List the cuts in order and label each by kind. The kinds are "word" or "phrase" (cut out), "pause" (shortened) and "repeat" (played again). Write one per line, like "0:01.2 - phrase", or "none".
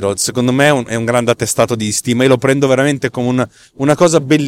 none